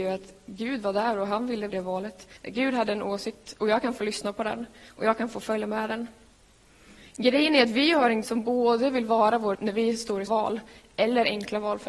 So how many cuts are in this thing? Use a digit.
6